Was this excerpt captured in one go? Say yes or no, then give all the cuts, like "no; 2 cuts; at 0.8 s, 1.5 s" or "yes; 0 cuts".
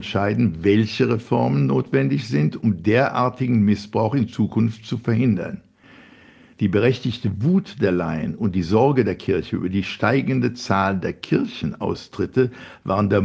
yes; 0 cuts